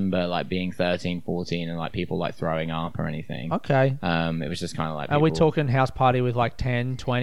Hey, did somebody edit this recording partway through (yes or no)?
no